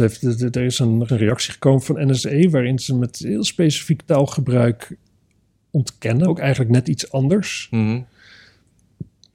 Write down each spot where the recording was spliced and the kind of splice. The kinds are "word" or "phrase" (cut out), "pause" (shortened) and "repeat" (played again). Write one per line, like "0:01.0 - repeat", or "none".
0:01.1 - word
0:06.3 - phrase